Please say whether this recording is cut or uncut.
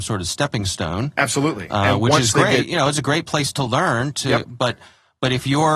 uncut